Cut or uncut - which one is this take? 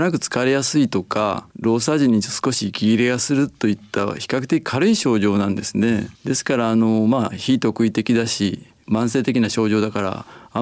cut